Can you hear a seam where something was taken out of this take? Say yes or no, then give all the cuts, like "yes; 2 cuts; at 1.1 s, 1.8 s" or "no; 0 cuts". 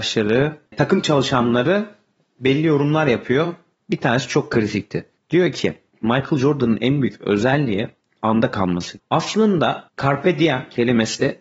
no; 0 cuts